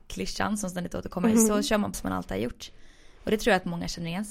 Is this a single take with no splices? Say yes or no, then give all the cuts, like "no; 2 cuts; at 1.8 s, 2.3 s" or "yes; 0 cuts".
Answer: no; 1 cut; at 1.9 s